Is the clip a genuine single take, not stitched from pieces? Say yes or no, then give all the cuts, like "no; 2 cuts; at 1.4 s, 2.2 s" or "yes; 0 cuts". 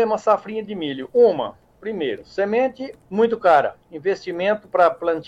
no; 2 cuts; at 3.0 s, 3.8 s